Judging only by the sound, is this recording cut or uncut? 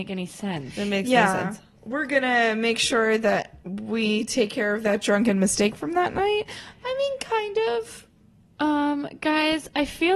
uncut